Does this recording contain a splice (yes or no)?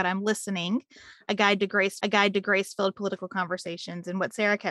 yes